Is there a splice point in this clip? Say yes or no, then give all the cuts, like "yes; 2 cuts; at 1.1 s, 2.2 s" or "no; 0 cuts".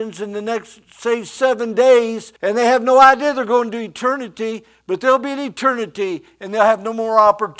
yes; 1 cut; at 2.4 s